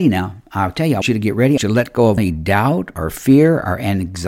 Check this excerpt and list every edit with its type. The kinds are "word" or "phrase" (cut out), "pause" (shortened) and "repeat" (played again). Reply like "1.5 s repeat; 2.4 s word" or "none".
1.0 s word; 1.6 s word; 2.2 s word